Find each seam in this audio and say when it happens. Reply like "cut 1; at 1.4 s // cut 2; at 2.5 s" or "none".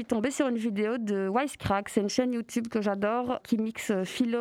cut 1; at 3.4 s